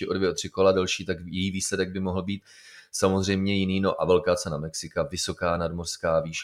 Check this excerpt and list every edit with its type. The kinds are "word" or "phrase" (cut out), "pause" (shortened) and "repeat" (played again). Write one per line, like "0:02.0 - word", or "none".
none